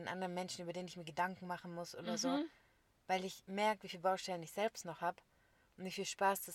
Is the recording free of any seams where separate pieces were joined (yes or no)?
yes